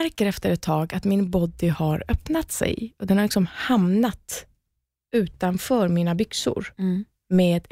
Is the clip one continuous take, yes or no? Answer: yes